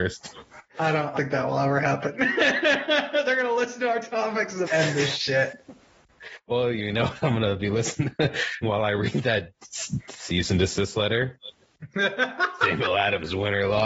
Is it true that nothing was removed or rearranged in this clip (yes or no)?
no